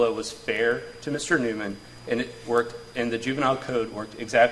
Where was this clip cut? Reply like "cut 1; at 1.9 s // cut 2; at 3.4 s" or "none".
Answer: none